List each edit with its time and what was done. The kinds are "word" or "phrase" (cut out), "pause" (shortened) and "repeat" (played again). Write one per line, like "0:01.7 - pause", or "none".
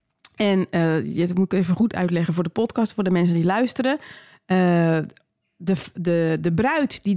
none